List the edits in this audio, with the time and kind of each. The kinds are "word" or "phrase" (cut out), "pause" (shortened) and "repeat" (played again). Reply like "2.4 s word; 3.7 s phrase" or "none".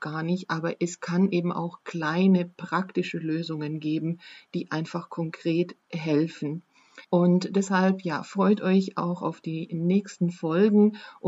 7.0 s pause

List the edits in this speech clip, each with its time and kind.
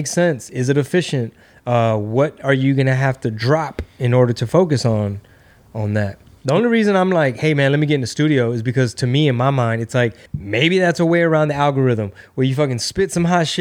10.3 s pause

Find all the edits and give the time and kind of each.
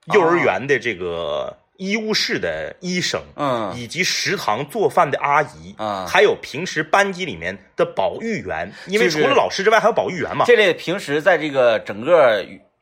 none

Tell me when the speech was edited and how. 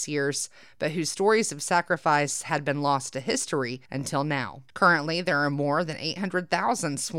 3.9 s pause; 4.7 s pause

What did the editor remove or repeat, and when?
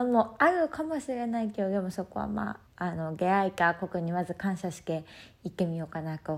2.7 s pause

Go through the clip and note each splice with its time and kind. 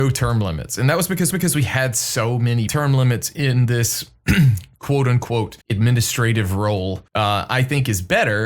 1.3 s repeat; 2.7 s phrase; 5.6 s pause; 7.1 s pause

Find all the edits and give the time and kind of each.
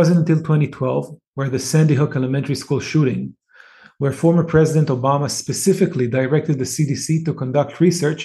none

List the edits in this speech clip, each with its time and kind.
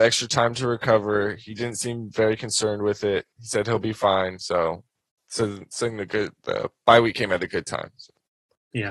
none

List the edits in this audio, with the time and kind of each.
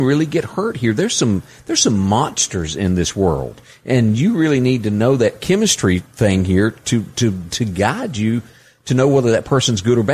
none

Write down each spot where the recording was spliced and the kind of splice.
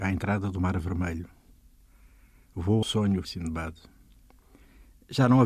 2.8 s word; 3.2 s word

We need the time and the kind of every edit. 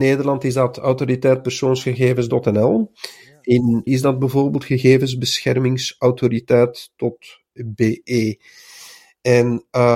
3.9 s word

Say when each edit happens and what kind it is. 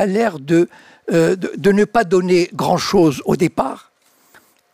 none

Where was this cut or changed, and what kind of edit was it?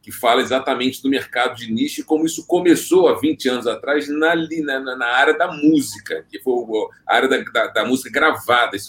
none

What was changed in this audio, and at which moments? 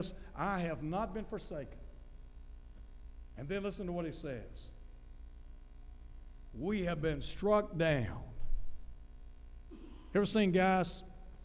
none

